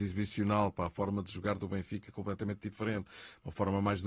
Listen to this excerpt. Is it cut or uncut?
uncut